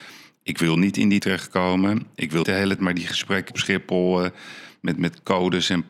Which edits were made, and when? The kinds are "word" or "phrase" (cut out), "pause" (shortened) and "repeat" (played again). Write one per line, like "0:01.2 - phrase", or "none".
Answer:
0:01.2 - word
0:02.4 - word
0:02.8 - word
0:03.5 - word